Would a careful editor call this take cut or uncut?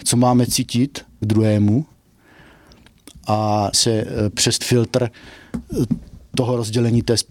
cut